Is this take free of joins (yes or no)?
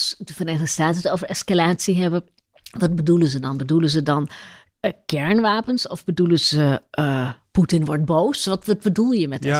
yes